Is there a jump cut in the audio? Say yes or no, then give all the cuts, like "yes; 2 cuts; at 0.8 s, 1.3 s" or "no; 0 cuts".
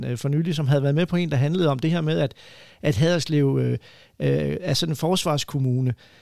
no; 0 cuts